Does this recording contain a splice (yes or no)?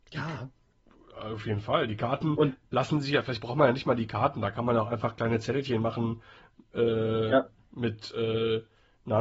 no